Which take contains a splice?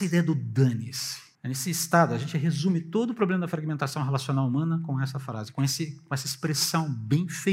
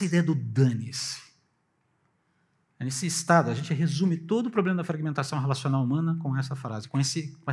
first; 1 cut; at 1.3 s

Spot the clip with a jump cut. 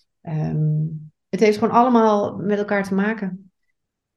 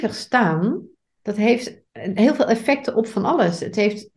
second; 2 cuts; at 1.1 s, 1.9 s

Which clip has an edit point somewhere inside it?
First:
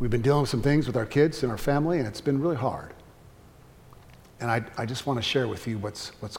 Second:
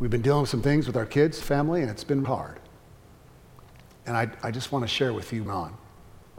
second; 3 cuts; at 1.4 s, 2.2 s, 5.5 s

